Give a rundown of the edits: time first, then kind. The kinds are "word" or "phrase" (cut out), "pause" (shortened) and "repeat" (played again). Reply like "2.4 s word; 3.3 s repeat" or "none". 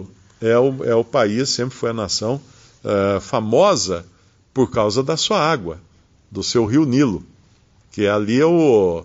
none

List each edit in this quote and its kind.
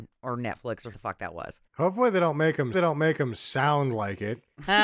0.9 s word; 1.7 s pause; 2.7 s repeat

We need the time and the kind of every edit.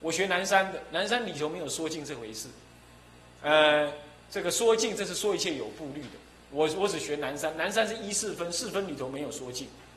none

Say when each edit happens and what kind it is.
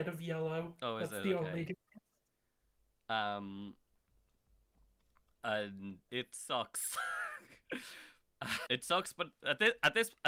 6.1 s word; 8.7 s word

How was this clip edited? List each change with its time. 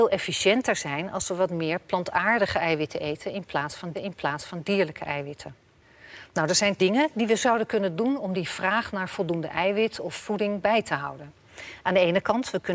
3.9 s repeat; 6.8 s word; 10.1 s word

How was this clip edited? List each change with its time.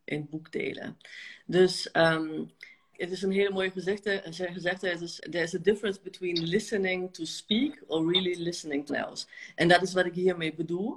2.9 s word; 5.2 s word; 8.9 s word

